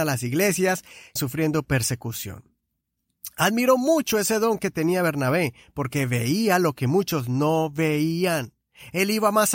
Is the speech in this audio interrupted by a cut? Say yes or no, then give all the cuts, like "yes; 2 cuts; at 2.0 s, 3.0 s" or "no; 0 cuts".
yes; 1 cut; at 1.2 s